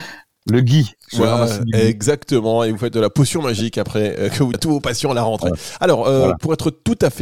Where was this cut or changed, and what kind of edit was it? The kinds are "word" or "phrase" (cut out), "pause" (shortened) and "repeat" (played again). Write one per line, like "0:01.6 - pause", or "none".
0:04.5 - word